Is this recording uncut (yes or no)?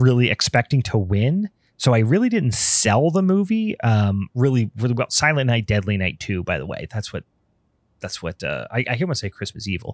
yes